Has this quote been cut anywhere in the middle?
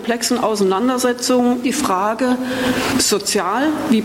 yes; 2 cuts; at 1.6 s, 2.9 s

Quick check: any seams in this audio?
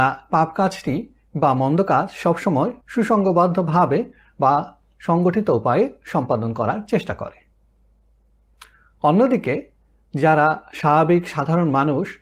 yes; 1 cut; at 2.8 s

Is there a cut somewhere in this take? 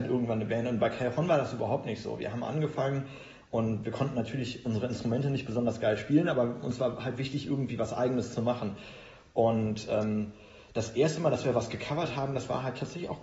no; 0 cuts

